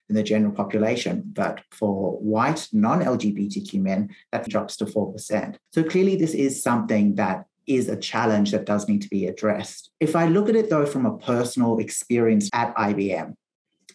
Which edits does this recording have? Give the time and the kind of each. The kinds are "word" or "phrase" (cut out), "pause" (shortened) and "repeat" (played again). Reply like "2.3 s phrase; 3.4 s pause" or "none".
4.5 s phrase; 5.7 s pause; 10.0 s pause; 12.5 s word